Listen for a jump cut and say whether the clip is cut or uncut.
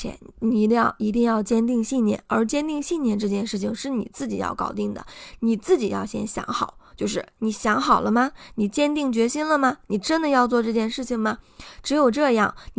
uncut